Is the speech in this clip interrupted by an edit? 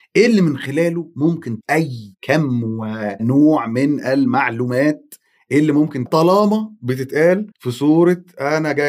yes; 3 cuts; at 1.6 s, 6.1 s, 7.5 s

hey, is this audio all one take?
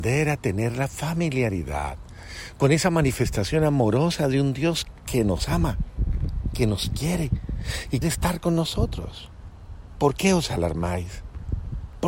no; 1 cut; at 8.0 s

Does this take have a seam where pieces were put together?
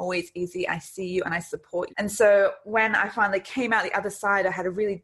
yes; 1 cut; at 1.9 s

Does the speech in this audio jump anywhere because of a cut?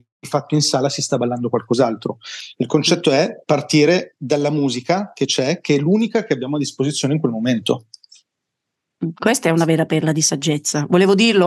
no; 0 cuts

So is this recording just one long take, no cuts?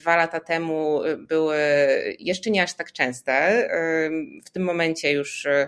yes; 0 cuts

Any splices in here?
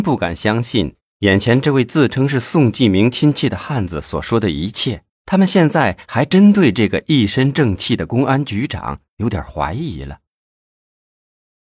yes; 1 cut; at 5.1 s

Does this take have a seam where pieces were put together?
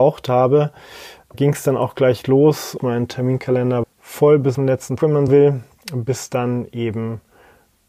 yes; 6 cuts; at 1.3 s, 2.8 s, 3.8 s, 4.5 s, 5.0 s, 5.3 s

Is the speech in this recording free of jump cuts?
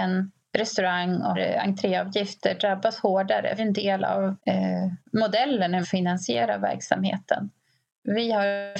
no; 4 cuts; at 1.3 s, 3.6 s, 4.4 s, 5.8 s

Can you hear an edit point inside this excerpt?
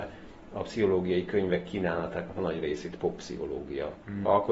no; 0 cuts

